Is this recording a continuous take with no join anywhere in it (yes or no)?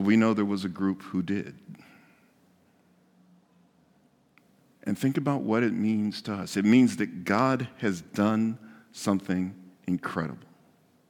yes